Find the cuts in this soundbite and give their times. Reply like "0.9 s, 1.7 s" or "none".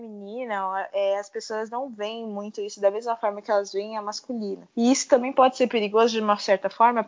4.7 s